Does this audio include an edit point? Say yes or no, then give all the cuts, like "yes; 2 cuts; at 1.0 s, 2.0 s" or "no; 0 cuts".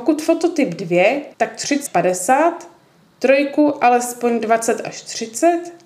yes; 2 cuts; at 1.3 s, 1.9 s